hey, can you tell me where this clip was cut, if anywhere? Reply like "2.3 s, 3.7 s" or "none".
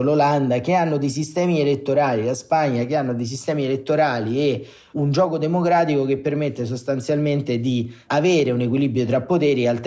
none